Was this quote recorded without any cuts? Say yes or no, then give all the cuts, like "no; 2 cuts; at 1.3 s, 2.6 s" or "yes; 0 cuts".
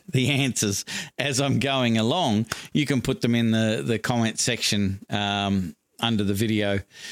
yes; 0 cuts